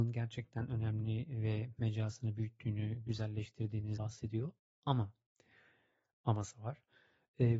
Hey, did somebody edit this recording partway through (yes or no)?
yes